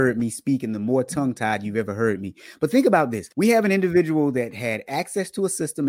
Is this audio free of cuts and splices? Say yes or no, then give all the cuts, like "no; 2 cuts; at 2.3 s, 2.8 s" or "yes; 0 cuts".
no; 1 cut; at 3.3 s